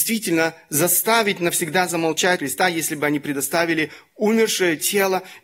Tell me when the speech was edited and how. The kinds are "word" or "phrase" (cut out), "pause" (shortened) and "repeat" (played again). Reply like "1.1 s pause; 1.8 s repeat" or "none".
2.4 s word